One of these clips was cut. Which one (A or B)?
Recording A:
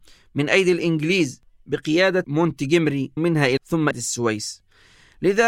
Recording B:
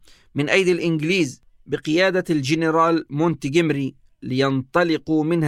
A